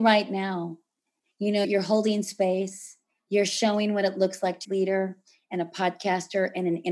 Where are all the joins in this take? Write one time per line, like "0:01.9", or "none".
0:01.6
0:04.6

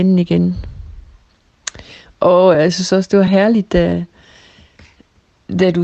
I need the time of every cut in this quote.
none

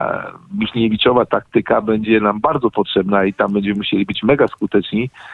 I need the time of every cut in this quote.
none

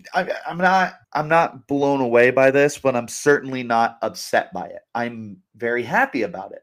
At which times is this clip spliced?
0:01.0
0:05.5

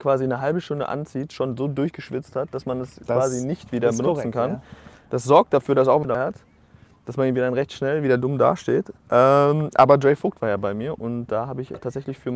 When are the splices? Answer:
0:06.0

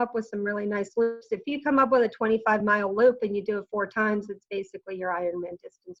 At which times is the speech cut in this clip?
none

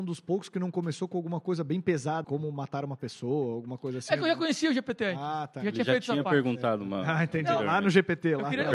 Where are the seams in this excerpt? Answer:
0:02.2

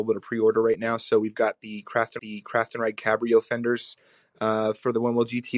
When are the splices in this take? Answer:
0:02.2

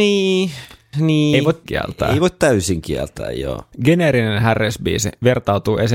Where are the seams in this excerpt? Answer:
0:01.6
0:03.7

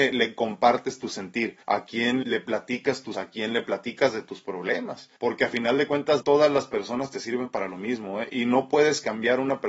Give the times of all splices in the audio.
0:01.6
0:02.2
0:03.1
0:05.2
0:06.2

